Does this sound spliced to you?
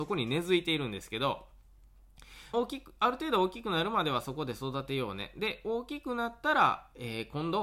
yes; 1 cut; at 2.5 s

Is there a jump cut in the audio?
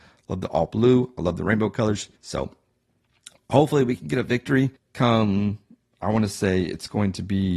yes; 2 cuts; at 2.2 s, 4.8 s

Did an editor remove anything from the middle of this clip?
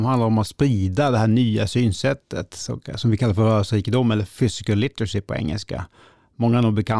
no; 0 cuts

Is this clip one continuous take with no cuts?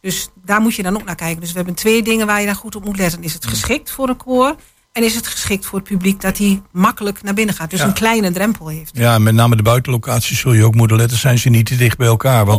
yes; 0 cuts

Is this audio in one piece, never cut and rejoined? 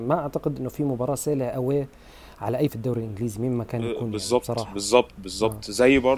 no; 1 cut; at 2.7 s

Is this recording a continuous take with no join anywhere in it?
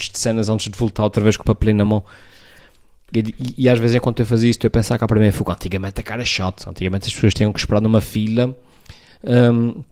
yes; 0 cuts

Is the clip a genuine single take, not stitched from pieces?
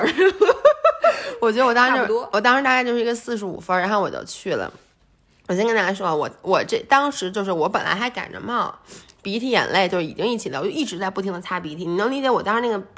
yes; 0 cuts

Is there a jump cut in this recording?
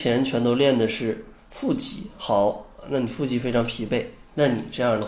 no; 0 cuts

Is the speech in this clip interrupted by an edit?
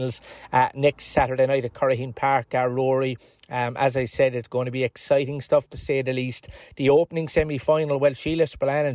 no; 0 cuts

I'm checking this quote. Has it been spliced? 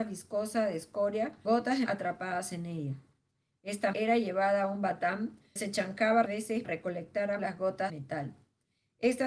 yes; 8 cuts; at 1.4 s, 1.9 s, 3.9 s, 5.6 s, 6.3 s, 6.6 s, 7.4 s, 7.9 s

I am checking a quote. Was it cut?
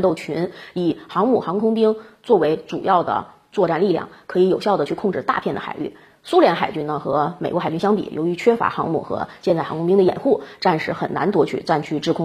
no; 0 cuts

